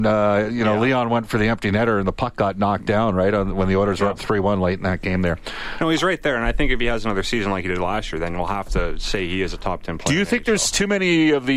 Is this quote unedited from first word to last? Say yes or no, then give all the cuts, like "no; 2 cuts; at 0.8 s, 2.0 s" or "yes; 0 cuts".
yes; 0 cuts